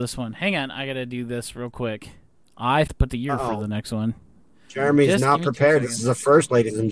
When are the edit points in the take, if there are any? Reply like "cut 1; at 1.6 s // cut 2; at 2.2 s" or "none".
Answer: cut 1; at 2.9 s